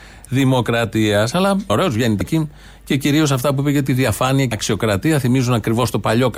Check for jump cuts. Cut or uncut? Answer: cut